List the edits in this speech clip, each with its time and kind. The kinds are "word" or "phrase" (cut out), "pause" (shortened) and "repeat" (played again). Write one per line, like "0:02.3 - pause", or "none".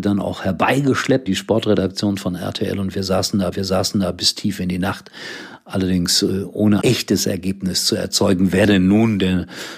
0:01.3 - word
0:03.5 - repeat
0:06.8 - word